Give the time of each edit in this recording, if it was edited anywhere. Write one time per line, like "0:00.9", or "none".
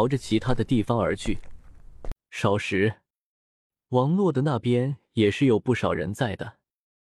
none